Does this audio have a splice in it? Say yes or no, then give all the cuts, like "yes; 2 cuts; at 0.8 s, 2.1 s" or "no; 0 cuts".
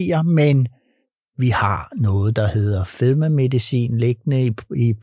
no; 0 cuts